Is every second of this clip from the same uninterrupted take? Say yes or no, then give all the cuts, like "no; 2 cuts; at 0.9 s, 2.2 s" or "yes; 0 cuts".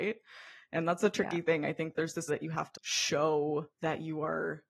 no; 3 cuts; at 2.3 s, 2.8 s, 3.7 s